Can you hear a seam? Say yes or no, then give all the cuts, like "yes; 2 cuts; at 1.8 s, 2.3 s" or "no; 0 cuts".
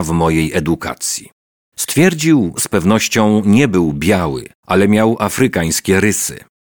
yes; 2 cuts; at 2.6 s, 4.6 s